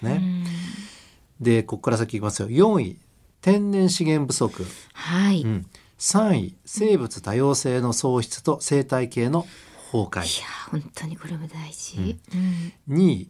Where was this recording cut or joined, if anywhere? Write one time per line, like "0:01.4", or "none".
none